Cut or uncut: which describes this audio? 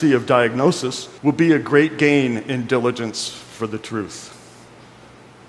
cut